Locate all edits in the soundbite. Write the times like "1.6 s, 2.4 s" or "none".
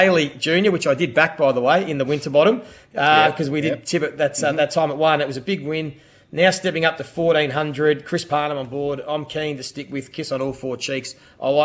none